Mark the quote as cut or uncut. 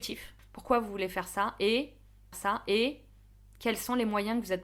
cut